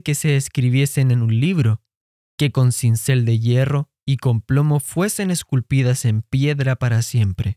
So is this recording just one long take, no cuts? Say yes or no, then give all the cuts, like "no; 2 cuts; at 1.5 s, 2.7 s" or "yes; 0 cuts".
yes; 0 cuts